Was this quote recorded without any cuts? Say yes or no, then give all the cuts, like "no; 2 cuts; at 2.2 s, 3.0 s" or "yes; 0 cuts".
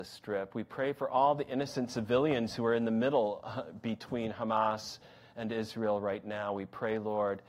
yes; 0 cuts